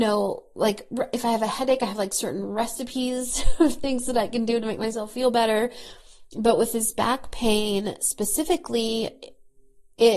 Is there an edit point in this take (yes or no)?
no